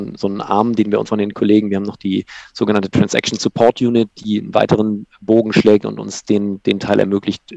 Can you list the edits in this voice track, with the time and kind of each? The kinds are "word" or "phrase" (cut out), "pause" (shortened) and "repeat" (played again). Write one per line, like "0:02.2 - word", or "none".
0:01.1 - phrase